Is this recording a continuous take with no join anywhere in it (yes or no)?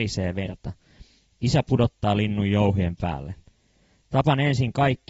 yes